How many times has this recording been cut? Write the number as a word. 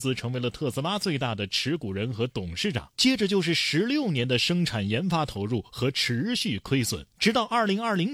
zero